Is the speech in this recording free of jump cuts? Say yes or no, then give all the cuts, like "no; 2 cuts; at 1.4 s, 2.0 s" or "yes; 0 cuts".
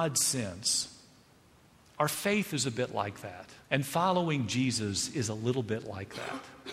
no; 1 cut; at 3.6 s